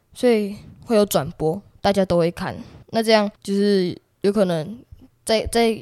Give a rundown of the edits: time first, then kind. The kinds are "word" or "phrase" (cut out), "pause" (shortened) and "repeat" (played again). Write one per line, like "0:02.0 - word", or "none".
0:02.8 - pause
0:03.4 - pause